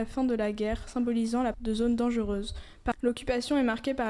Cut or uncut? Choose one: cut